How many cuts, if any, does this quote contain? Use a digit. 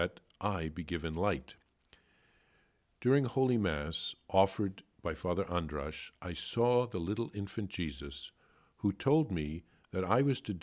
0